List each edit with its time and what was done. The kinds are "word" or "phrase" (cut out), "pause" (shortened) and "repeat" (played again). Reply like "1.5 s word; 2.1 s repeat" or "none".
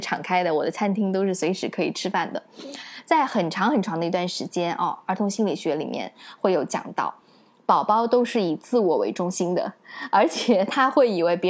none